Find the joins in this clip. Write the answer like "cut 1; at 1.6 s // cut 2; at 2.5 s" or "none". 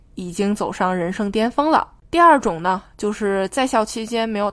cut 1; at 2.0 s